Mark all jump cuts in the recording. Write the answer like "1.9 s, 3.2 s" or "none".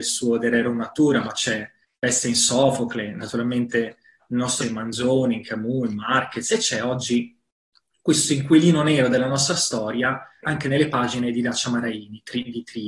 4.6 s, 10.4 s

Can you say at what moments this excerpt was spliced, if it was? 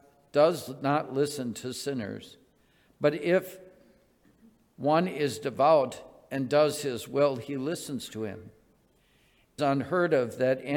9.6 s

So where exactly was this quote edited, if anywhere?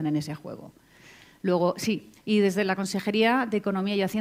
2.2 s

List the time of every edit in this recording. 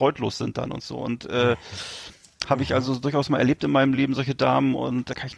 none

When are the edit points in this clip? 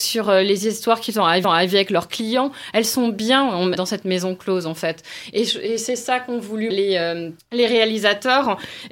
1.4 s, 3.8 s, 6.7 s, 7.4 s

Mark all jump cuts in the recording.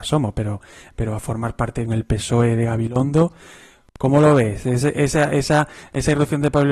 1.9 s

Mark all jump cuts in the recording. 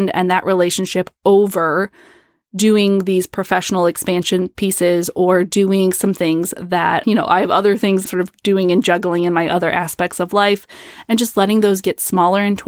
7.0 s, 8.1 s

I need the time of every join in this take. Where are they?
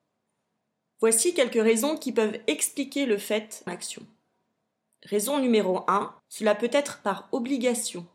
3.7 s, 6.2 s

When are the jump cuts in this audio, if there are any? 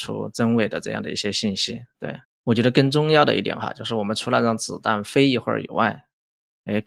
2.2 s

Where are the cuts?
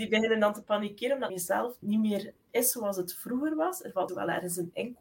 1.3 s, 1.8 s, 4.1 s

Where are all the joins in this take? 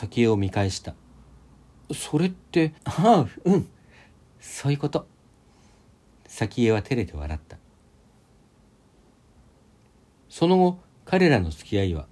2.8 s

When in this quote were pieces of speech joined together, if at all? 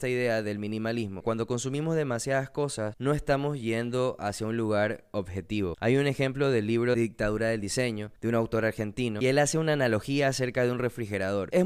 8.1 s

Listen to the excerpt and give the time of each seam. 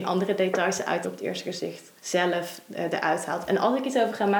1.0 s, 2.0 s

